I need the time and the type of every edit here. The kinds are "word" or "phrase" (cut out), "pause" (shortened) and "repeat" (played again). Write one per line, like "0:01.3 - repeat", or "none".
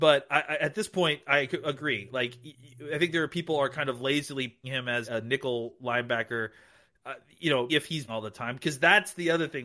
0:04.6 - word
0:05.0 - word
0:07.7 - word
0:08.1 - word